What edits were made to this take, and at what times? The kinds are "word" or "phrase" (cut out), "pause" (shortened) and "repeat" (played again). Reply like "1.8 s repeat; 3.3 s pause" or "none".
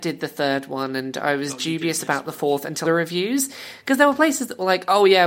2.9 s phrase